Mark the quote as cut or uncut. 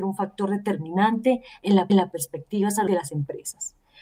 cut